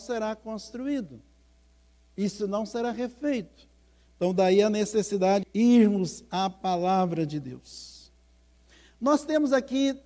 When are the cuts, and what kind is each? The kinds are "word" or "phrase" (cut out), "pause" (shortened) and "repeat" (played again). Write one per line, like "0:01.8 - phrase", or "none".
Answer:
0:05.4 - word